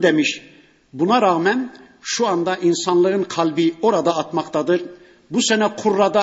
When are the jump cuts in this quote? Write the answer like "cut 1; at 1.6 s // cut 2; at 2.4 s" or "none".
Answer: none